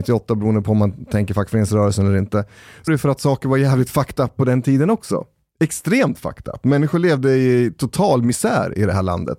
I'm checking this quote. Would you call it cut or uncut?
cut